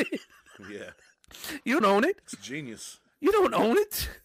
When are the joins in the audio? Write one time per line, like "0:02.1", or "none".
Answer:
0:01.8